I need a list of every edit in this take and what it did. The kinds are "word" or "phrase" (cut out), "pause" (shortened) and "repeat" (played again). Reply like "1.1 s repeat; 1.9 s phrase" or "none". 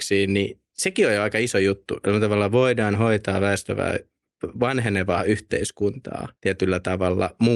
6.3 s pause